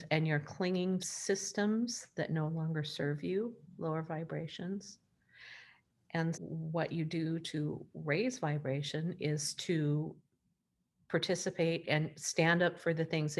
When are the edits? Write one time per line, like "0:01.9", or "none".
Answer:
0:01.0
0:06.3